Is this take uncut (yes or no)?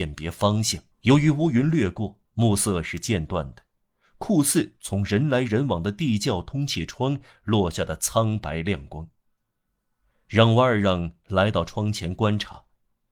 no